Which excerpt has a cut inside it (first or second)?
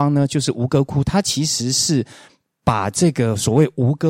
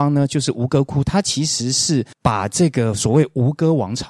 second